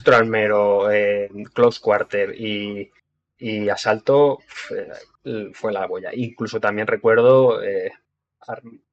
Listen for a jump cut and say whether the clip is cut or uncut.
uncut